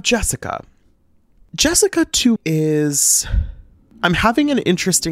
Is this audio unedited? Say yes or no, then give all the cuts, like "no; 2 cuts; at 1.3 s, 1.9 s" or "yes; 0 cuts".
no; 1 cut; at 2.4 s